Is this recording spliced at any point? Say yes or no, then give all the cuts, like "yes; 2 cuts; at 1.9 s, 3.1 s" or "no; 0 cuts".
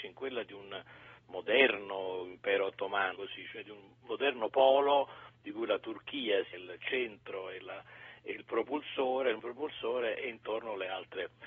yes; 3 cuts; at 3.2 s, 6.5 s, 9.4 s